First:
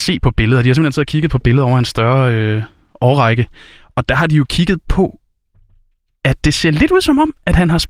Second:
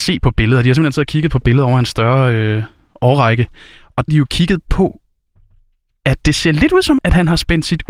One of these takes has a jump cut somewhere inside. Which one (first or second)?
second